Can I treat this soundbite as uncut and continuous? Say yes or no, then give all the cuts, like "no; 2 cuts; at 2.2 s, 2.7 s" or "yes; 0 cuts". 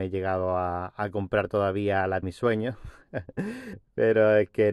no; 1 cut; at 2.2 s